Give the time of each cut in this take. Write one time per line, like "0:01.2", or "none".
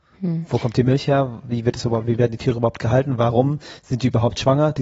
none